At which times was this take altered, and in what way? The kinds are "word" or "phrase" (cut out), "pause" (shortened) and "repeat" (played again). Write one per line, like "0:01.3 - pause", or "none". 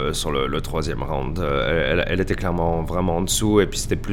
none

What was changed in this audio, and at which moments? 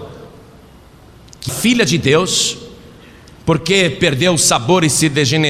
0:01.5 - word

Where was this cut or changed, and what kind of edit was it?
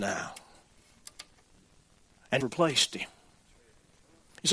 0:02.4 - word

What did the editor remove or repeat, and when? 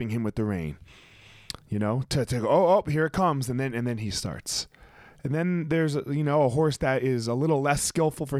none

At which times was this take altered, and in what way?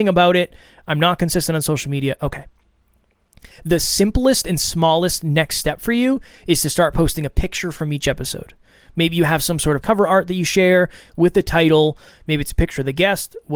0:09.8 - word

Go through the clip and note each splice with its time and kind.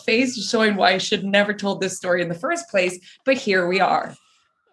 none

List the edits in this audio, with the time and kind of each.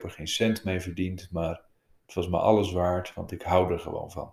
none

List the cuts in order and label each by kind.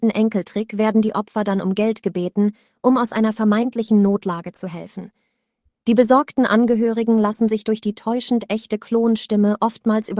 none

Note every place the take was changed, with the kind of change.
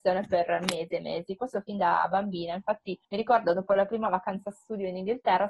0:03.0 - pause

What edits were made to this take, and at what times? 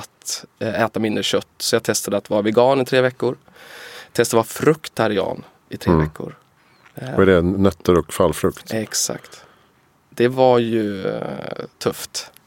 none

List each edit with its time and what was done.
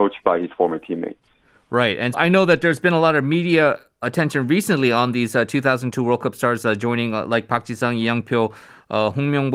0:02.1 - word
0:04.0 - word

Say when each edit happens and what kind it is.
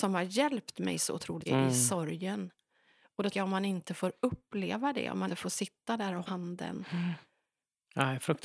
0:01.5 - word
0:03.3 - word
0:05.3 - word
0:06.3 - word

